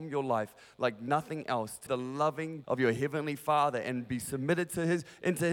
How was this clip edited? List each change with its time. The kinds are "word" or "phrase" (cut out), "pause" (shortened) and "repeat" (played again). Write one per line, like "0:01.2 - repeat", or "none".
0:01.9 - word
0:02.6 - word